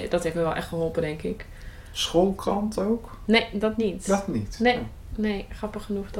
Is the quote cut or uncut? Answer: uncut